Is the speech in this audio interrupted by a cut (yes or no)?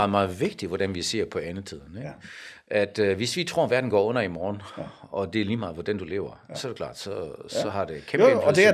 no